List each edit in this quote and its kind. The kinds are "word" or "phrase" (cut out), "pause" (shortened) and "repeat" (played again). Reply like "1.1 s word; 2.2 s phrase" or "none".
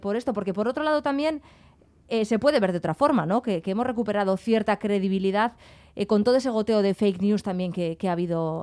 none